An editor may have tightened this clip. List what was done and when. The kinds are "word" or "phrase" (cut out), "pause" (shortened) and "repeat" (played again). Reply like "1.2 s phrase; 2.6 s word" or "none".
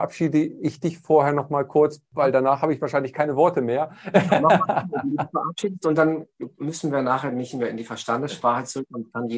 none